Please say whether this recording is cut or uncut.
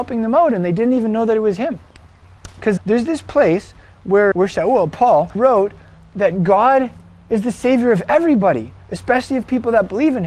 cut